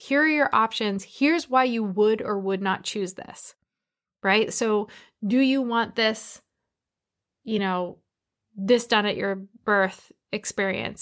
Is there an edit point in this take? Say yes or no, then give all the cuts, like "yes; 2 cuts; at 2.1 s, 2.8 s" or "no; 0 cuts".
no; 0 cuts